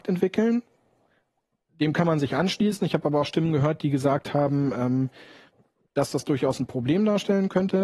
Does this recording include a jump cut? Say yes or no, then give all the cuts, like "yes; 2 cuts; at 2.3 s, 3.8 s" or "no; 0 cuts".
no; 0 cuts